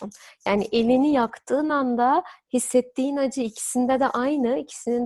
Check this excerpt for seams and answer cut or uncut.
uncut